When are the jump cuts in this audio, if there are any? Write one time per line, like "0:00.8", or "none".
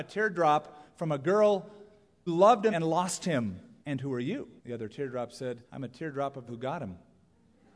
0:02.3
0:02.7
0:03.8
0:04.6
0:05.7
0:06.5